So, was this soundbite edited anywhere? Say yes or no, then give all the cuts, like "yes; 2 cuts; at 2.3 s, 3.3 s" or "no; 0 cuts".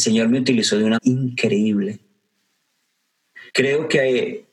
yes; 2 cuts; at 1.0 s, 3.5 s